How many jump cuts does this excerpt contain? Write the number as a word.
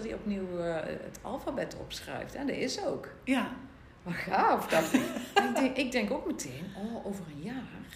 zero